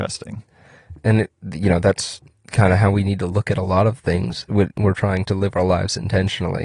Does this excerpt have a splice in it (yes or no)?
no